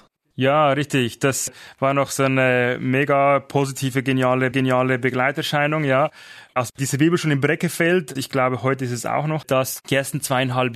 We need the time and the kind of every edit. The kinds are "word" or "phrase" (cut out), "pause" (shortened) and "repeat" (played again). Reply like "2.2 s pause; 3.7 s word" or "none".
4.5 s repeat; 8.2 s word; 9.4 s word